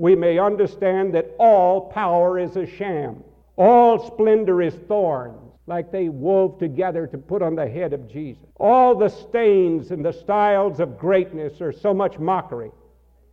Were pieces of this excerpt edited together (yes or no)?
yes